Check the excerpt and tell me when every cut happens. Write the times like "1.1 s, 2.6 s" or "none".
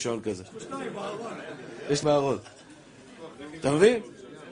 2.0 s